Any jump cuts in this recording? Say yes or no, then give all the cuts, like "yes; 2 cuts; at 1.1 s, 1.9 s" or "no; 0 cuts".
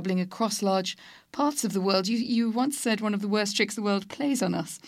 no; 0 cuts